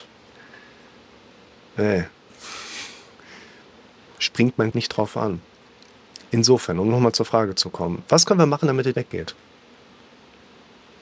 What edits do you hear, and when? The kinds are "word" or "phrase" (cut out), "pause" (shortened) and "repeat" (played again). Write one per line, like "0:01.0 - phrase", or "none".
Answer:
0:04.7 - word
0:08.9 - word